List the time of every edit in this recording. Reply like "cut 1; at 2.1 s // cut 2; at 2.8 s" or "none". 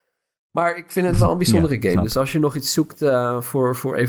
none